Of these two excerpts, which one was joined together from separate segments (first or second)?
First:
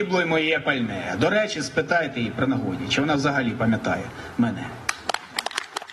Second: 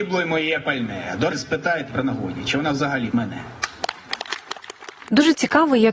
second